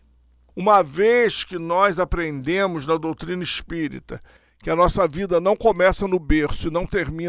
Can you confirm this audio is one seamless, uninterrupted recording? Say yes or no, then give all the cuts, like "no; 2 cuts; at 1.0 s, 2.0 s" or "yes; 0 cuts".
yes; 0 cuts